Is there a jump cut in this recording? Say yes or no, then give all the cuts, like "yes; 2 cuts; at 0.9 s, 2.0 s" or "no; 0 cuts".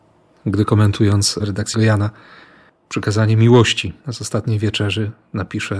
yes; 3 cuts; at 1.4 s, 1.7 s, 4.0 s